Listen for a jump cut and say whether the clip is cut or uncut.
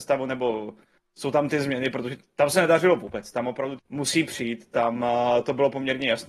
cut